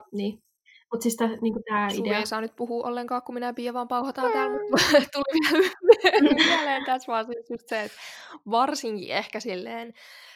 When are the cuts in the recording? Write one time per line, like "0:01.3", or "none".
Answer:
none